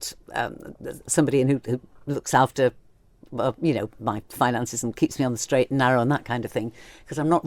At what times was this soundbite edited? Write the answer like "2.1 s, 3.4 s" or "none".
none